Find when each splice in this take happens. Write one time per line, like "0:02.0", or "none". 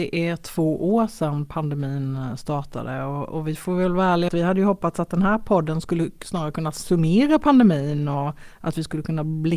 0:04.3